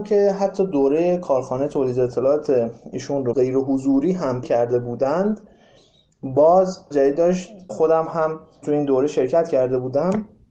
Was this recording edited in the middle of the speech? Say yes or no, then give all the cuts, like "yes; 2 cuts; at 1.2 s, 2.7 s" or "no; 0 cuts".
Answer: yes; 4 cuts; at 4.4 s, 6.9 s, 7.7 s, 8.6 s